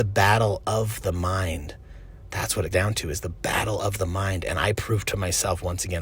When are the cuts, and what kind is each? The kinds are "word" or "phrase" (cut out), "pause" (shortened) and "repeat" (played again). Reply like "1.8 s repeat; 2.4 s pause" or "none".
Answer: 2.7 s word